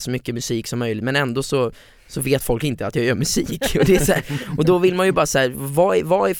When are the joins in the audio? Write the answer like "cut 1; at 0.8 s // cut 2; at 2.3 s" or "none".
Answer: none